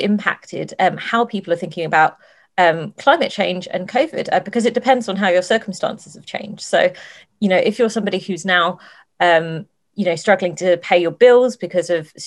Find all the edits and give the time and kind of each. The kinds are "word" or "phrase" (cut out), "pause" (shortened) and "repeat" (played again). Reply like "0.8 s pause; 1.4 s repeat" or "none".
none